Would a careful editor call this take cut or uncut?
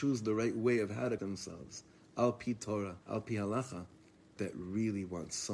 cut